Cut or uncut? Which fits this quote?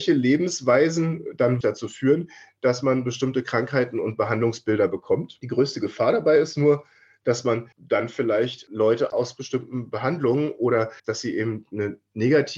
cut